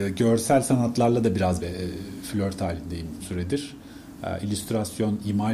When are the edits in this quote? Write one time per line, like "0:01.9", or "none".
0:01.6
0:03.2